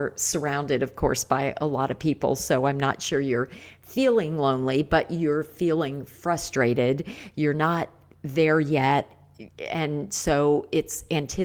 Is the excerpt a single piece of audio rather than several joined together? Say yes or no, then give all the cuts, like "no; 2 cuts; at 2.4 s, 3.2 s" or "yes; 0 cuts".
yes; 0 cuts